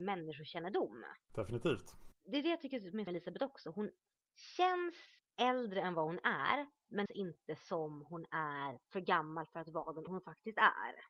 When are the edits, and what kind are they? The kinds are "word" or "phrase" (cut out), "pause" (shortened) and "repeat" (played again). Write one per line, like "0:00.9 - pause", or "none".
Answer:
0:01.2 - pause
0:03.1 - phrase
0:05.2 - pause
0:07.1 - phrase
0:08.8 - pause
0:10.1 - word